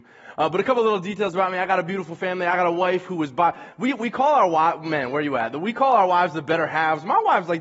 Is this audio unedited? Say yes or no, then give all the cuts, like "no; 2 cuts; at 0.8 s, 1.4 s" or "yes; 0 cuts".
yes; 0 cuts